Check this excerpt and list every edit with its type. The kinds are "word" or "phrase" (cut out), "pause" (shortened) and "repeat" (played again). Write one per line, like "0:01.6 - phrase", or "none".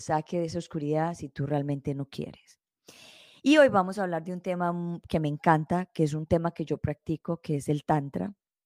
none